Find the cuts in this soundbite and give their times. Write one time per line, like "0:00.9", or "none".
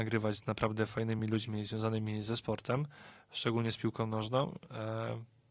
none